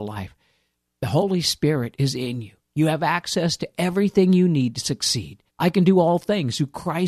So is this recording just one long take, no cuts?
no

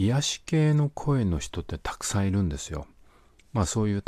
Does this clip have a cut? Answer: no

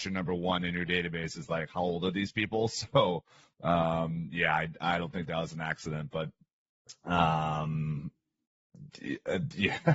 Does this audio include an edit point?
no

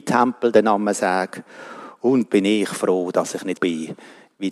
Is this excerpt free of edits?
no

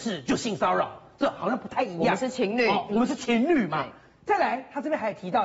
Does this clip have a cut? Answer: no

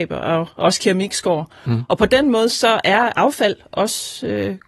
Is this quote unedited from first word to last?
yes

